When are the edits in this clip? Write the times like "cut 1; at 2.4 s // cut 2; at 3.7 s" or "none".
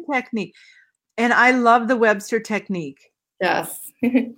none